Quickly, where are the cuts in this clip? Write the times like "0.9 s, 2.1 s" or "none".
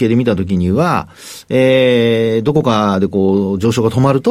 none